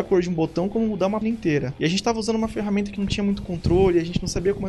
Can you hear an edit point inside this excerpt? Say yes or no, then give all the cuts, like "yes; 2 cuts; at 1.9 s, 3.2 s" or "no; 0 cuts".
yes; 2 cuts; at 1.2 s, 3.0 s